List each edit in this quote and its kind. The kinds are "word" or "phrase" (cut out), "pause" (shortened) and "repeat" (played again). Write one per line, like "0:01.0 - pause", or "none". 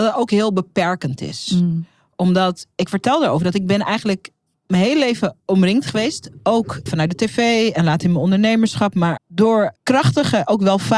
0:06.9 - word
0:09.2 - word
0:09.8 - word